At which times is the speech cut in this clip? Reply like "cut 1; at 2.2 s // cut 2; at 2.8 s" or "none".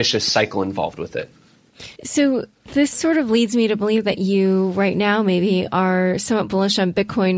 cut 1; at 2.0 s